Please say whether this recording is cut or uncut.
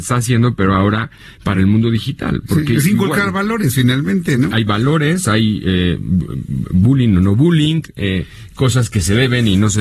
uncut